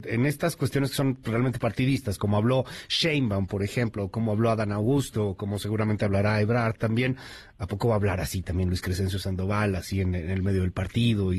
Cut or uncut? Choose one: uncut